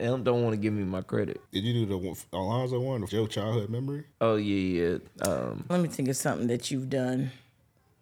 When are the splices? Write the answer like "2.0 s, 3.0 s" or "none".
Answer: 1.5 s, 3.1 s, 4.1 s, 5.7 s